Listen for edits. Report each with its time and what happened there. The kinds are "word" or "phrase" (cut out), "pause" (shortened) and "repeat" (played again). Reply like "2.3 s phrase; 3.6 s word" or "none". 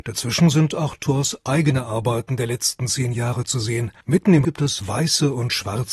4.0 s pause; 4.4 s word